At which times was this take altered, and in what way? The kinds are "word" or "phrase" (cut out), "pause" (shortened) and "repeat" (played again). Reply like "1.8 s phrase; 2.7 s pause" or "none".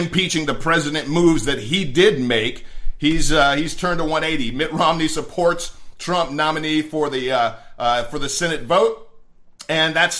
none